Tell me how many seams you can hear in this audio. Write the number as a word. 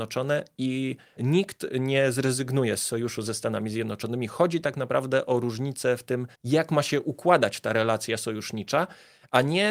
one